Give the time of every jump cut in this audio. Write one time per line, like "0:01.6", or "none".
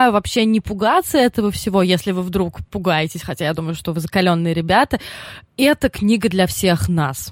none